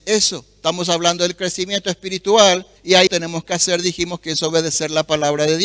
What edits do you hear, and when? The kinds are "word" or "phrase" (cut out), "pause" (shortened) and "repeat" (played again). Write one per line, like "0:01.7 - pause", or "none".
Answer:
0:02.8 - pause
0:03.1 - phrase